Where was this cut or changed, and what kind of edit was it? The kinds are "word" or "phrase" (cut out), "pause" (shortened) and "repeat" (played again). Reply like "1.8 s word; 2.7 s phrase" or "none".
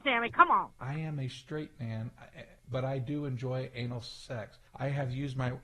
2.6 s pause; 4.7 s pause